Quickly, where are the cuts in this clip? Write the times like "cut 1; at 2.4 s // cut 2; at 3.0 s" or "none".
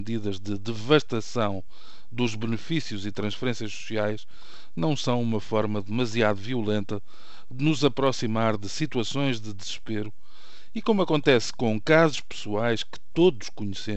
none